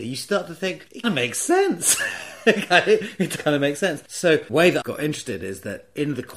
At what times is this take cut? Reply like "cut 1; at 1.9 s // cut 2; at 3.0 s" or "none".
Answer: cut 1; at 1.0 s // cut 2; at 3.4 s // cut 3; at 4.5 s // cut 4; at 4.8 s